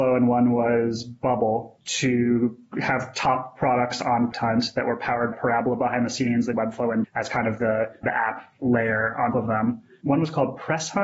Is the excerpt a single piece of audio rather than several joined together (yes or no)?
no